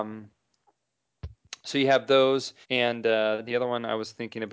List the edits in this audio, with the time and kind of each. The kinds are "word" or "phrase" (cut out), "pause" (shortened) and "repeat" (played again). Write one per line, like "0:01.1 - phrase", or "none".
0:02.6 - pause